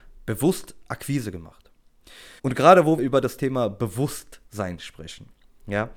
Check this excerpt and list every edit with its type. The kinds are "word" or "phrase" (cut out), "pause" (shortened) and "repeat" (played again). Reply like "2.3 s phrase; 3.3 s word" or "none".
2.4 s pause; 3.0 s word